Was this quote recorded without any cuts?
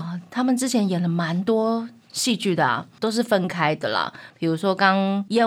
yes; 0 cuts

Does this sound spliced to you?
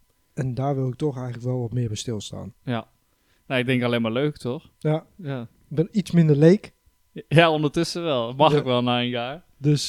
no; 0 cuts

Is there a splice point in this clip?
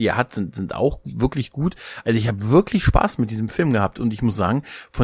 no; 0 cuts

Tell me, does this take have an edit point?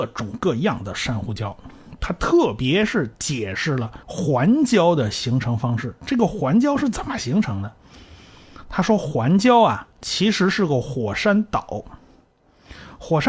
yes; 1 cut; at 4.0 s

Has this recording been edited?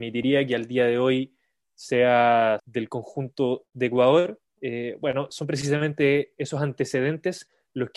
yes; 2 cuts; at 2.6 s, 4.5 s

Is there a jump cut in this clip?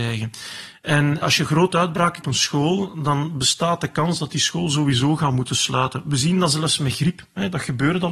yes; 2 cuts; at 1.2 s, 2.2 s

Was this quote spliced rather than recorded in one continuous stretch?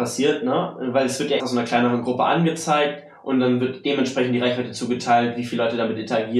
yes; 1 cut; at 1.4 s

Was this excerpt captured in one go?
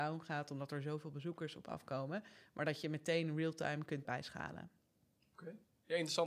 no; 1 cut; at 4.0 s

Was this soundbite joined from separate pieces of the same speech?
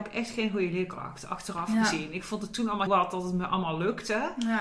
yes; 1 cut; at 2.9 s

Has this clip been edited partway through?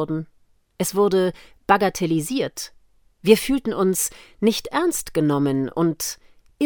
no; 0 cuts

